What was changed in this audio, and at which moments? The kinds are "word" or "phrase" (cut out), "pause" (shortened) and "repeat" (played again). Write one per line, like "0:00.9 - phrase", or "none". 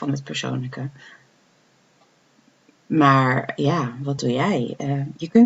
none